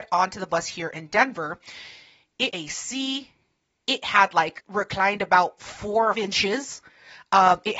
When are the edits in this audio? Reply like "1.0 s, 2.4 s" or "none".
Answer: 2.5 s, 4.6 s, 6.1 s